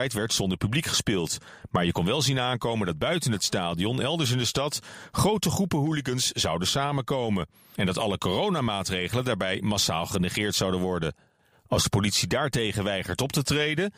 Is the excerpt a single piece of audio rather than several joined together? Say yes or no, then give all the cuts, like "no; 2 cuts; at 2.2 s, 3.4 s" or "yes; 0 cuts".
yes; 0 cuts